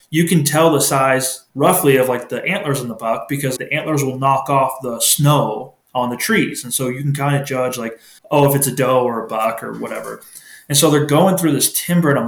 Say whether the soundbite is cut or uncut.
cut